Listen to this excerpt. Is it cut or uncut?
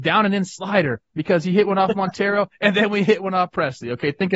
uncut